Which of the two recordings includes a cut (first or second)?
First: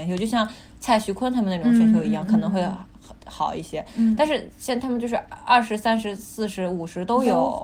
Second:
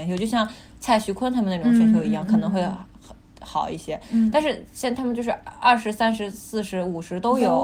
first